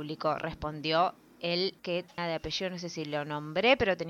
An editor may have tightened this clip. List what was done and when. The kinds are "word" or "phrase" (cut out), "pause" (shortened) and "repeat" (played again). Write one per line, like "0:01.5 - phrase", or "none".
0:01.8 - word
0:02.2 - word